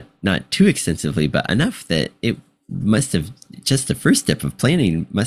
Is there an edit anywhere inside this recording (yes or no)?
no